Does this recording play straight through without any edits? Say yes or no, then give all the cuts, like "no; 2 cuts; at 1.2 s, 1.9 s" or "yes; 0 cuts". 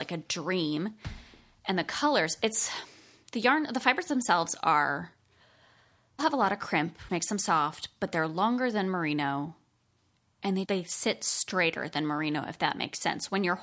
no; 3 cuts; at 6.2 s, 7.1 s, 10.6 s